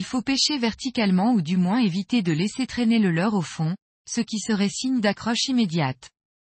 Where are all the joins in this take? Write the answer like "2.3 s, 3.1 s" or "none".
none